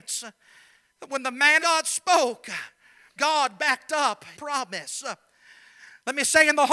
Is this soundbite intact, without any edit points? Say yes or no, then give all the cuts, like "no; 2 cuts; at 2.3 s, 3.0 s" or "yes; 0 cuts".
no; 3 cuts; at 1.6 s, 3.2 s, 4.3 s